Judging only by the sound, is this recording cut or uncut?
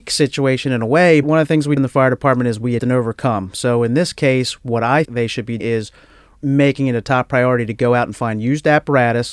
cut